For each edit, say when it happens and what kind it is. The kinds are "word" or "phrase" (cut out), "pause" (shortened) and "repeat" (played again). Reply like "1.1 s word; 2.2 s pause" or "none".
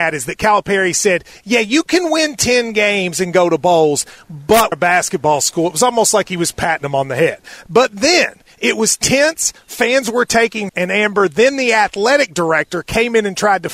4.7 s word; 10.7 s word